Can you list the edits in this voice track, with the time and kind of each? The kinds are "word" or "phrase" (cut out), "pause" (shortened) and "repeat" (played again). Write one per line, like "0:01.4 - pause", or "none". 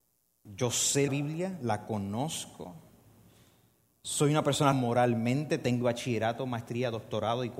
0:01.1 - word
0:04.7 - word
0:05.8 - word